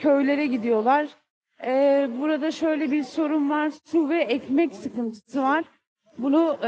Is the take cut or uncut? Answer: uncut